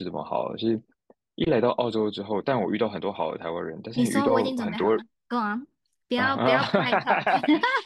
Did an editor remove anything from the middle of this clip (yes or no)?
no